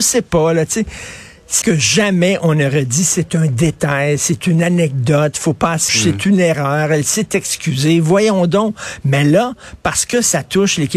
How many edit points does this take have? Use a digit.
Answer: 2